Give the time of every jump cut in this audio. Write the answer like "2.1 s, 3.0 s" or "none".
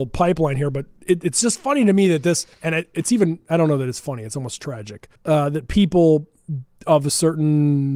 2.5 s, 5.2 s